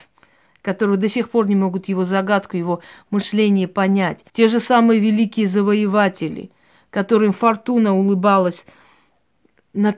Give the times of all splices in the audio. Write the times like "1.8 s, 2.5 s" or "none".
4.3 s